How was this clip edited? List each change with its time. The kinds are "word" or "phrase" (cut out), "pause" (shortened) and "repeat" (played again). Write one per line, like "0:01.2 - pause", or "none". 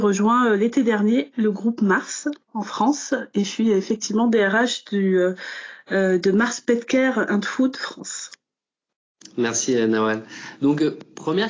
none